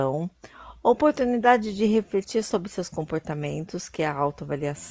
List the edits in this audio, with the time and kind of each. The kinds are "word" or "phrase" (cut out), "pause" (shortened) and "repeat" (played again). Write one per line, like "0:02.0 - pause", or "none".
none